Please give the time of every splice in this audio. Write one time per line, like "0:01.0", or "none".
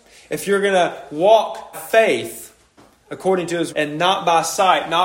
0:01.7
0:03.7